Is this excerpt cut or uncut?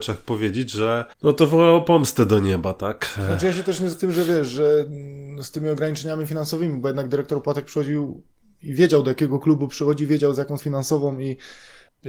cut